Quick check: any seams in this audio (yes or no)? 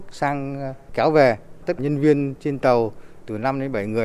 yes